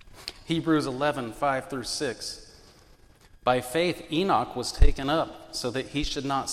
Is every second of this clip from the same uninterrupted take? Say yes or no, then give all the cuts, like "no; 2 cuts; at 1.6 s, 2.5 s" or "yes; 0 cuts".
yes; 0 cuts